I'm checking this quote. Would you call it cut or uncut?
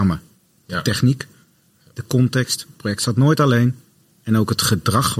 uncut